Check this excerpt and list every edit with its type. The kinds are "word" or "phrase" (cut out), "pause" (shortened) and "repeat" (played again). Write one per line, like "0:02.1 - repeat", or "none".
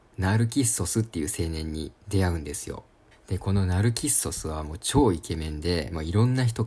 0:03.1 - pause